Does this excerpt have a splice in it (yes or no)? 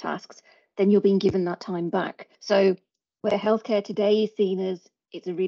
yes